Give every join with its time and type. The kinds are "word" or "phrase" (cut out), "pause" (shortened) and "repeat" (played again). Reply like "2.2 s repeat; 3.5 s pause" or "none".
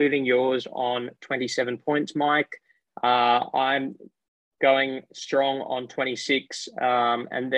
none